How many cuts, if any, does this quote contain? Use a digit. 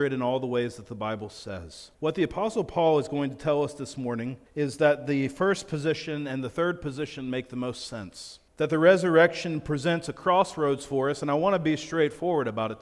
3